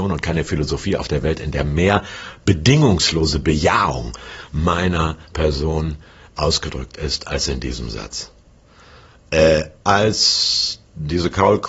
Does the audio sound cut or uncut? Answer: uncut